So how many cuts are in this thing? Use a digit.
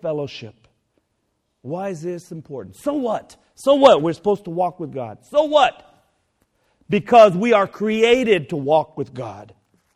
0